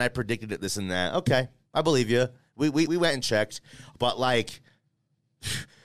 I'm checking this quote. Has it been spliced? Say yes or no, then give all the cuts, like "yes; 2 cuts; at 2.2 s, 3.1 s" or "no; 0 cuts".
yes; 1 cut; at 2.9 s